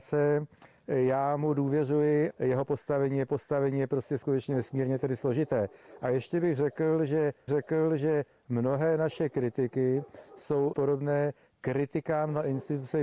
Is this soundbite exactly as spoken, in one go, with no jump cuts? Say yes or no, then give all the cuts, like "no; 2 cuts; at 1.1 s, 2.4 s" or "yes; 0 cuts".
no; 4 cuts; at 2.3 s, 3.3 s, 7.5 s, 10.7 s